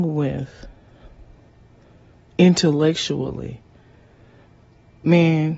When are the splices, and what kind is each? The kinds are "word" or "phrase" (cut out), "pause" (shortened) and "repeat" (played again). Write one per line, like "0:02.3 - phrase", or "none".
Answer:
none